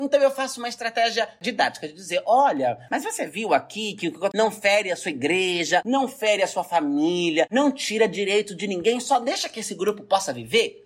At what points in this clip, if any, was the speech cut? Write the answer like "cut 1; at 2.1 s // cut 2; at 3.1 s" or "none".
cut 1; at 4.3 s